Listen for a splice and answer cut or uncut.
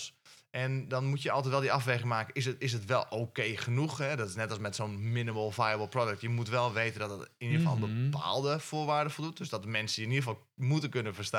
uncut